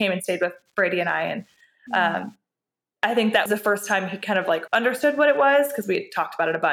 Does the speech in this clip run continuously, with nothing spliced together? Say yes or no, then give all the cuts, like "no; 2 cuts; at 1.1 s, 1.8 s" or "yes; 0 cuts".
no; 2 cuts; at 3.5 s, 4.7 s